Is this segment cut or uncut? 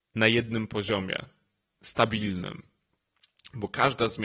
uncut